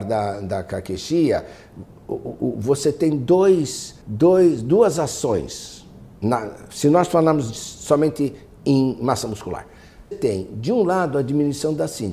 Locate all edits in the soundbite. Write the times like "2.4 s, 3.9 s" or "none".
4.0 s, 10.1 s